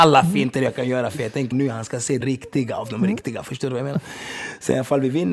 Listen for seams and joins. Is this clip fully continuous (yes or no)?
no